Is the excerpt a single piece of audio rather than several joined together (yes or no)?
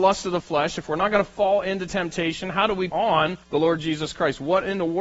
no